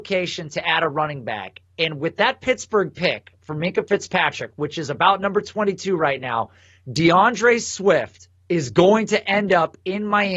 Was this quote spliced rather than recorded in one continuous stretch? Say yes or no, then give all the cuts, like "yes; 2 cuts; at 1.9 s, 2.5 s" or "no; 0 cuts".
no; 0 cuts